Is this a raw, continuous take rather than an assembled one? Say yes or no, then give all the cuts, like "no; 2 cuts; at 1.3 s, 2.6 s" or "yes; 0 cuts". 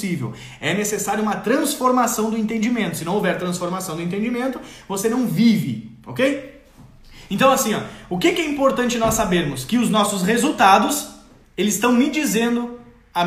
yes; 0 cuts